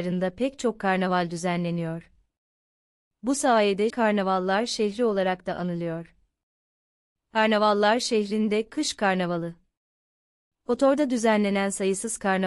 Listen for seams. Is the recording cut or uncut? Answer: cut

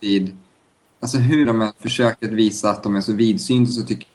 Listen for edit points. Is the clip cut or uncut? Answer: cut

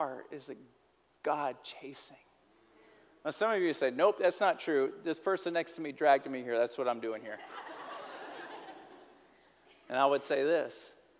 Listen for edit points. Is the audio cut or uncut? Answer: uncut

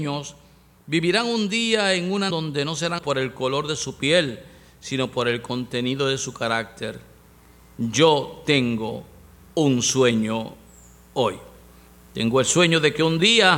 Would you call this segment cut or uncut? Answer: cut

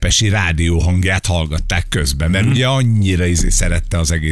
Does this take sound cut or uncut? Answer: uncut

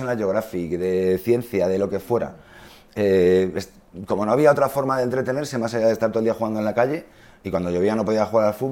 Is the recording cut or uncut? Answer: uncut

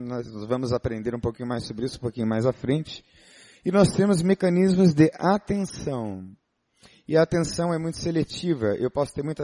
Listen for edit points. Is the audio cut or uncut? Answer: uncut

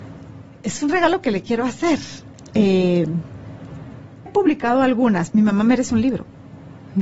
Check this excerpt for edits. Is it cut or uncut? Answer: cut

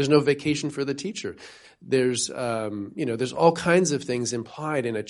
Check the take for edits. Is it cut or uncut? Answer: uncut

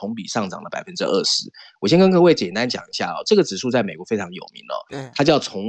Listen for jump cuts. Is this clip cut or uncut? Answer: uncut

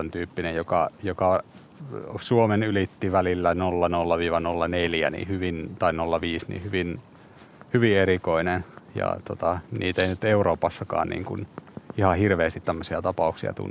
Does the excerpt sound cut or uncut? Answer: cut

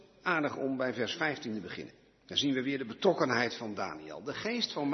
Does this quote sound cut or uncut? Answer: uncut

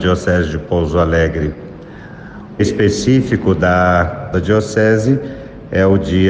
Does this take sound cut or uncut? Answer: cut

